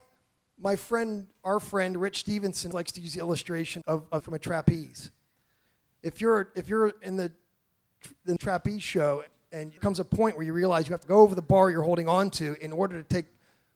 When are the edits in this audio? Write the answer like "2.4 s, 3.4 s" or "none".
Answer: 2.7 s, 3.8 s, 4.2 s, 8.4 s, 9.8 s, 11.0 s